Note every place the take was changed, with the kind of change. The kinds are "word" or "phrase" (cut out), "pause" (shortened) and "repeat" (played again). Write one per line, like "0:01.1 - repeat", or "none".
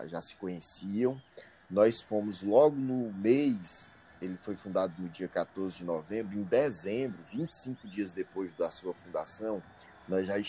none